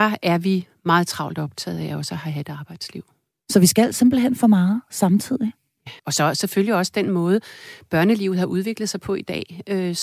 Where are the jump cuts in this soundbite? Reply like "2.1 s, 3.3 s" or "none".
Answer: 6.0 s